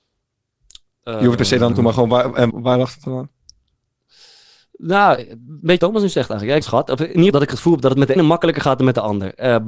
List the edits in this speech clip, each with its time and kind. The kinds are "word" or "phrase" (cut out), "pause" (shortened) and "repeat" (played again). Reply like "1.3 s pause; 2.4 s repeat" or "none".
1.4 s word; 1.7 s word; 2.5 s word; 5.2 s word; 5.8 s word; 6.6 s word; 7.3 s word; 8.2 s word